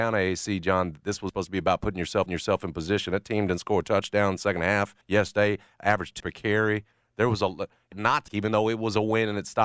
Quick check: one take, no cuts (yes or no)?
no